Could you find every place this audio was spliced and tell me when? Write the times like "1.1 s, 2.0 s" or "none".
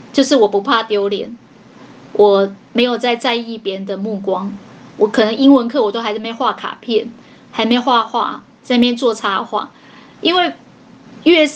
2.6 s